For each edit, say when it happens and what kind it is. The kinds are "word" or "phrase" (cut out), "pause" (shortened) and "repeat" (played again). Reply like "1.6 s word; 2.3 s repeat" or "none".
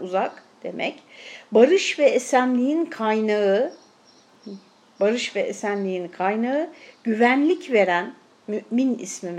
none